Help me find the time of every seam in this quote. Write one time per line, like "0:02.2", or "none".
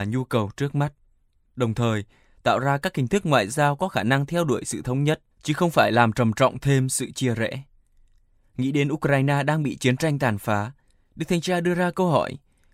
0:05.3

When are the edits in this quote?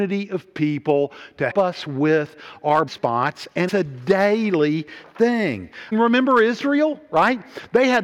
0:01.5
0:02.9
0:03.7
0:05.9

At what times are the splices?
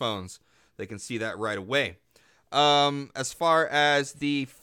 none

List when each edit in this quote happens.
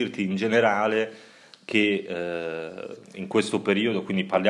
0:03.0

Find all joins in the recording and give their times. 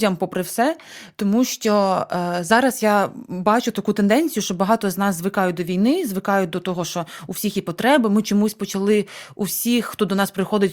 none

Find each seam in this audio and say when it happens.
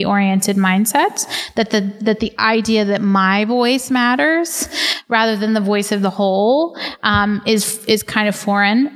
none

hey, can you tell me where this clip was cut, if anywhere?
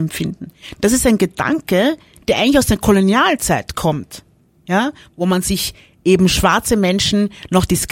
none

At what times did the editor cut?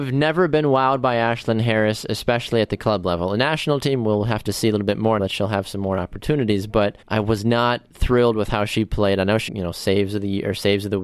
0:05.2
0:07.0
0:09.5

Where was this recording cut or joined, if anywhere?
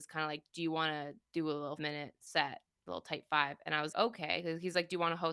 0:01.8
0:03.9

